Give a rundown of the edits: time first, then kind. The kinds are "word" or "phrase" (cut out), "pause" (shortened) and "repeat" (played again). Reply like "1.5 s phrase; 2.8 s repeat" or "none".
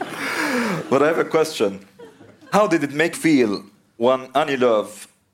3.1 s word